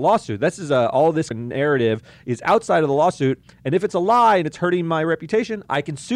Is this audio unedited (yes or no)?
no